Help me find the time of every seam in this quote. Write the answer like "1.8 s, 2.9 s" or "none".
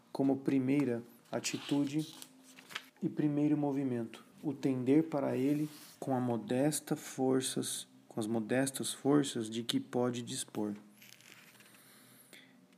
2.9 s, 4.3 s, 5.9 s